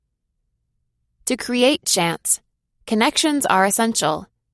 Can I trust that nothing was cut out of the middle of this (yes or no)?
yes